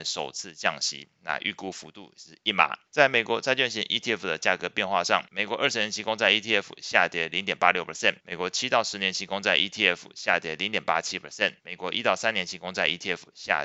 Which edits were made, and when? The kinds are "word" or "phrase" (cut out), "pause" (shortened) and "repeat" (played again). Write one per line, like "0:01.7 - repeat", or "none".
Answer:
0:02.9 - pause
0:05.3 - pause
0:08.2 - pause
0:11.6 - pause